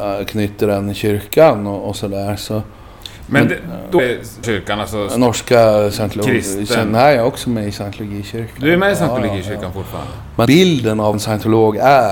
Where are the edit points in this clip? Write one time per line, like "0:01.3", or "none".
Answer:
0:04.0
0:04.4
0:10.5
0:11.1